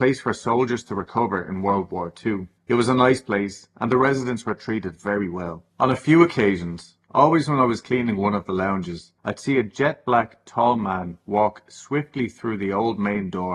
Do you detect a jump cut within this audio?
yes; 3 cuts; at 2.6 s, 5.7 s, 9.2 s

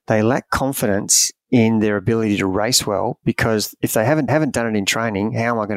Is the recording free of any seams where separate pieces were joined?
no; 2 cuts; at 1.4 s, 4.3 s

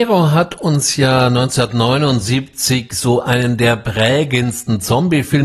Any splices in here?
no; 0 cuts

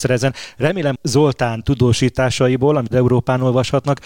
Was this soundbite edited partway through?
yes; 2 cuts; at 1.0 s, 2.9 s

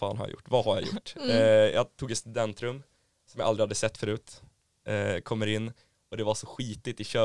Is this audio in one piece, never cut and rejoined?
yes; 0 cuts

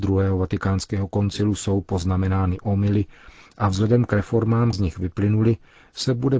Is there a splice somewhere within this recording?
yes; 1 cut; at 4.7 s

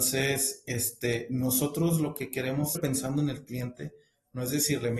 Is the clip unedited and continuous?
no; 1 cut; at 2.7 s

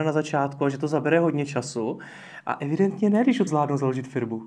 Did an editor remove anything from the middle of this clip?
yes; 1 cut; at 3.5 s

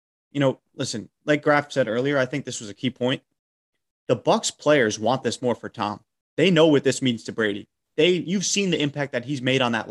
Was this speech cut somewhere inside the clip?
no; 0 cuts

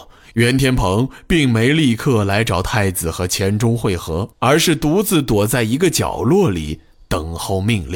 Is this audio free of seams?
no; 1 cut; at 4.3 s

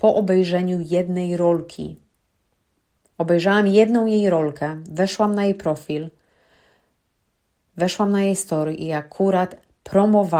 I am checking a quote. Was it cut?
yes; 1 cut; at 2.2 s

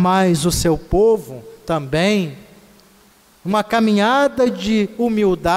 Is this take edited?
no; 0 cuts

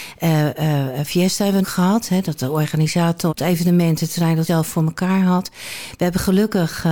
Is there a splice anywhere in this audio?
yes; 4 cuts; at 1.1 s, 1.6 s, 3.3 s, 4.5 s

